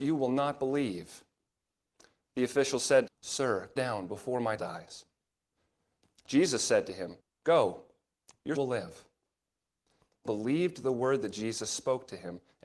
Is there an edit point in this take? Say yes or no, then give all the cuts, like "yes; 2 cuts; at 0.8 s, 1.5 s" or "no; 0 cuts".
yes; 6 cuts; at 3.1 s, 3.8 s, 4.6 s, 7.2 s, 8.5 s, 10.2 s